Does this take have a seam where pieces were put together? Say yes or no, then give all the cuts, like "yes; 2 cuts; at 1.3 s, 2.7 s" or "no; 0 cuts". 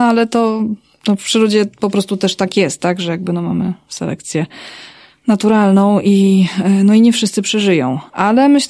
no; 0 cuts